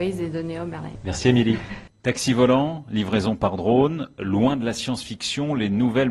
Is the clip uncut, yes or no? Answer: yes